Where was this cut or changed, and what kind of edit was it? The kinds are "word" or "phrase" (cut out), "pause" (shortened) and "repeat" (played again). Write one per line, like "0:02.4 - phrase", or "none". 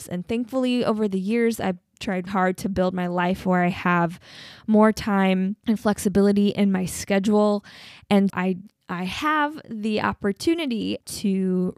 0:02.3 - word
0:08.3 - word